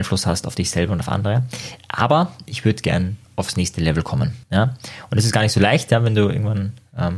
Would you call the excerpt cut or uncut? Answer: cut